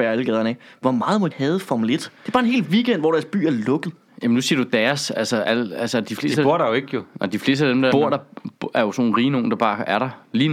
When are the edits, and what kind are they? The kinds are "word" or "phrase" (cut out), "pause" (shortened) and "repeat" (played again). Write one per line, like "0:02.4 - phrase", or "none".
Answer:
0:01.3 - phrase
0:02.2 - pause
0:04.1 - pause
0:07.9 - word